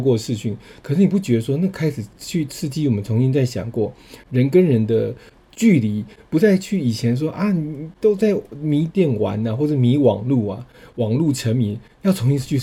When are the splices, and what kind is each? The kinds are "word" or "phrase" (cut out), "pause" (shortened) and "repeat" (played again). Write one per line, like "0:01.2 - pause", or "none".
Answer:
none